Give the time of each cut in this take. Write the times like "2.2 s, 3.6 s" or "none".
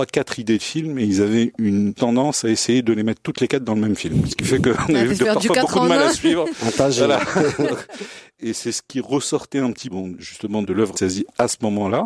2.0 s, 9.9 s, 10.9 s